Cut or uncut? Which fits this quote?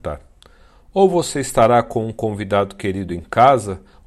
uncut